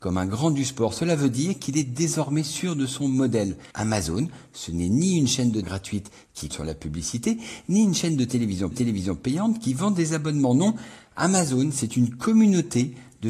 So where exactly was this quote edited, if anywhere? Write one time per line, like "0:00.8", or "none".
0:03.7
0:05.6
0:06.5
0:08.7